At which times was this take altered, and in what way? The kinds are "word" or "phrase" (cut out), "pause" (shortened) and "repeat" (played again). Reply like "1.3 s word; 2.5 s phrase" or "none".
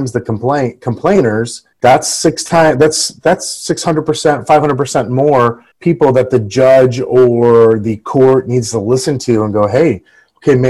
1.7 s pause; 5.7 s pause